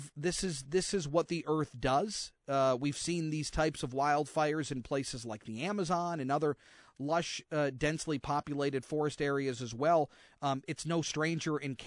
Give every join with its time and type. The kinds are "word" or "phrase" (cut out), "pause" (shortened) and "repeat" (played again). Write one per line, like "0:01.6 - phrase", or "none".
none

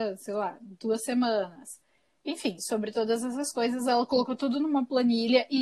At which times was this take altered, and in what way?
none

